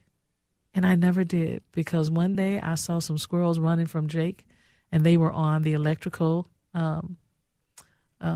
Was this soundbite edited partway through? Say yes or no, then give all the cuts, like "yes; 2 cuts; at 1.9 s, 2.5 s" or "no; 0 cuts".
no; 0 cuts